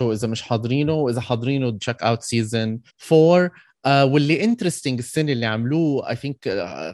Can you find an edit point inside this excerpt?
yes; 2 cuts; at 1.8 s, 2.9 s

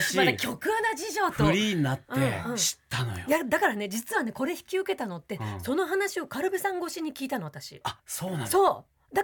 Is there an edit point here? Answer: yes; 1 cut; at 8.0 s

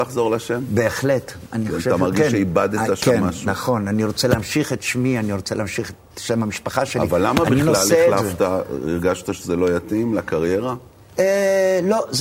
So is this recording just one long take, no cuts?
yes; 0 cuts

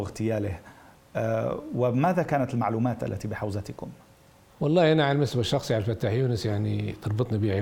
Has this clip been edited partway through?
no; 0 cuts

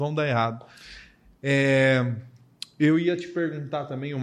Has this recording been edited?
no; 0 cuts

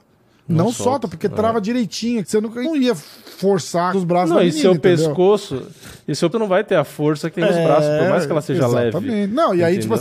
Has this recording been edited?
yes; 5 cuts; at 2.2 s, 2.6 s, 3.9 s, 6.3 s, 7.3 s

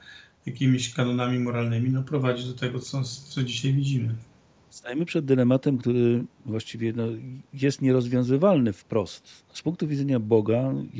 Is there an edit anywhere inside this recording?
no; 0 cuts

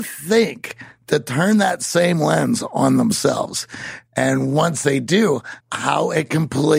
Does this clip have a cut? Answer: yes; 1 cut; at 5.6 s

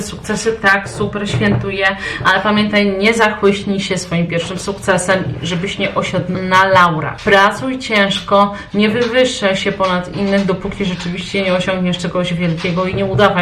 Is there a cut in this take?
no; 0 cuts

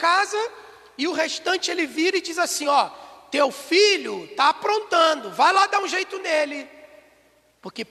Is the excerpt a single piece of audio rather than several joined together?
yes; 0 cuts

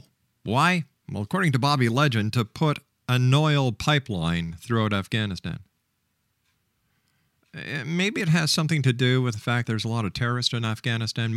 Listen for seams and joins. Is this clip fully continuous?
no; 1 cut; at 9.6 s

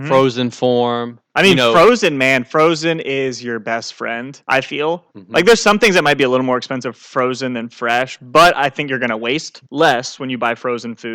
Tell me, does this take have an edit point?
yes; 4 cuts; at 1.2 s, 4.4 s, 5.1 s, 9.7 s

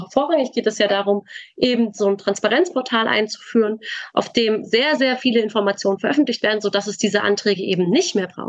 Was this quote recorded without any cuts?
yes; 0 cuts

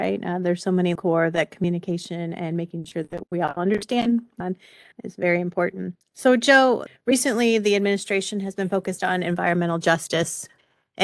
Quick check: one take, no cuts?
no; 3 cuts; at 1.0 s, 4.4 s, 6.0 s

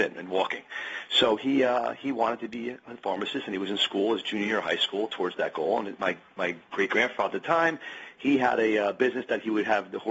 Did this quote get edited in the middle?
no; 0 cuts

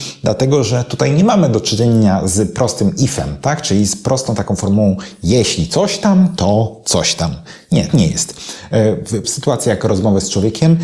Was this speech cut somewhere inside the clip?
yes; 2 cuts; at 7.9 s, 9.2 s

